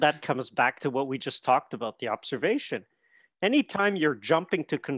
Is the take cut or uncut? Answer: uncut